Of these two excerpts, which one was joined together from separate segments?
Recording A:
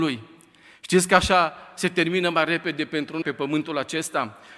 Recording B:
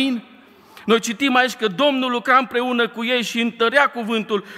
A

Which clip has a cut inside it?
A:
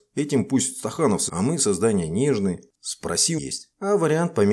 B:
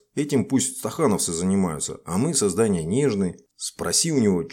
A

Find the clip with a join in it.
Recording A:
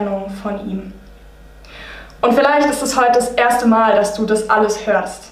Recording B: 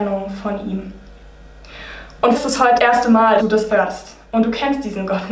B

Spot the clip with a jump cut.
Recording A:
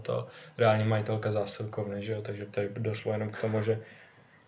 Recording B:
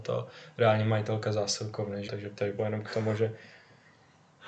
B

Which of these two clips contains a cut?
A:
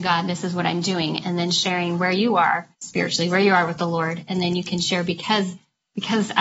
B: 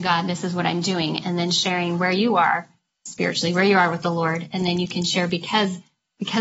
A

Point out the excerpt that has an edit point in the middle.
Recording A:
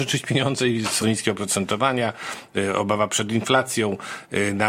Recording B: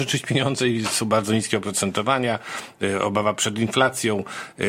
A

